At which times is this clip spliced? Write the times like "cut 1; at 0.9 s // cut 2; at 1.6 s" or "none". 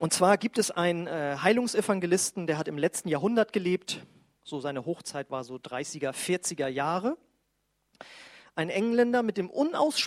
none